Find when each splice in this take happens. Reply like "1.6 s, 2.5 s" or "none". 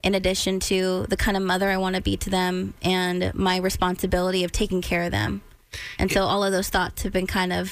none